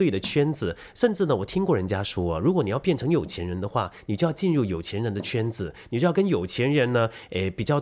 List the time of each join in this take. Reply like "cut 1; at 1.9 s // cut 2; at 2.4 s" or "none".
none